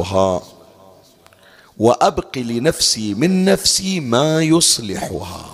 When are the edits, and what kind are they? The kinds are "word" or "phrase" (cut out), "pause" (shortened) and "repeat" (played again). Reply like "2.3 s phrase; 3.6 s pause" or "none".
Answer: none